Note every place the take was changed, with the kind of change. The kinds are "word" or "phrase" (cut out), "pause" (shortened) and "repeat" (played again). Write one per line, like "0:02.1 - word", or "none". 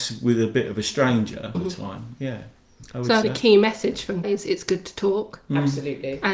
0:01.5 - word
0:03.2 - word
0:04.2 - word

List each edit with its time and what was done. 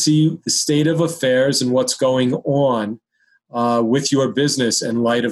none

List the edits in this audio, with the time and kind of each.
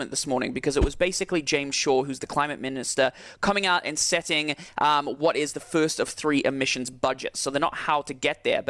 none

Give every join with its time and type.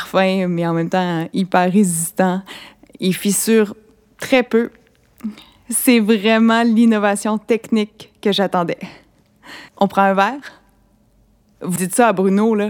0:09.7 - pause
0:11.8 - word

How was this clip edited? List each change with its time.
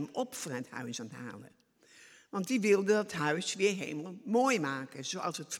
none

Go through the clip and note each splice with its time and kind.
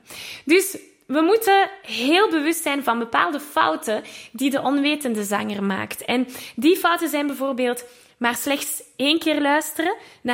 none

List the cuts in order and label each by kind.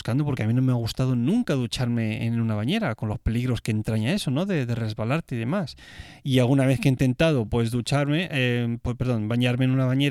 none

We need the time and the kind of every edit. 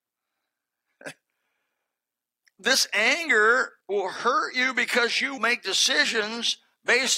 0:02.4 - word
0:03.8 - pause
0:05.4 - word

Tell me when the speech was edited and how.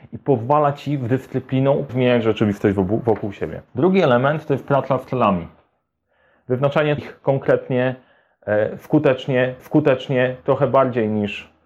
0:01.9 - word
0:03.7 - pause
0:07.0 - phrase
0:09.6 - repeat

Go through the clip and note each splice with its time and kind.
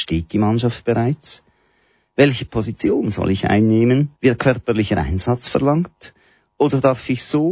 0:04.2 - pause

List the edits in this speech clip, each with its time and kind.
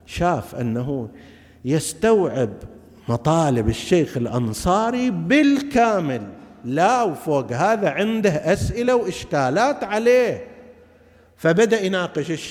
none

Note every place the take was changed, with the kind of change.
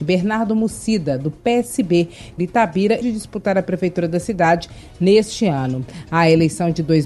0:02.4 - phrase
0:03.0 - phrase

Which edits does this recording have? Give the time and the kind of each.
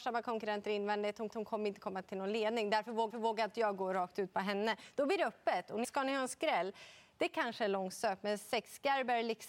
0:01.3 - repeat
0:03.1 - repeat
0:05.8 - phrase

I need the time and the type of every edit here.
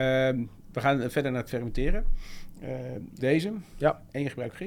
0:03.2 - word

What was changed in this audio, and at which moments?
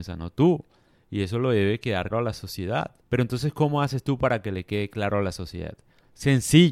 0:02.1 - word
0:03.0 - pause

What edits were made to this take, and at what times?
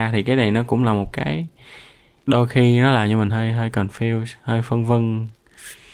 none

